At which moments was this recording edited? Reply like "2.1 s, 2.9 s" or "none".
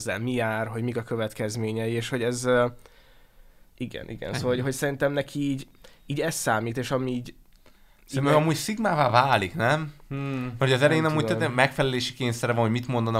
none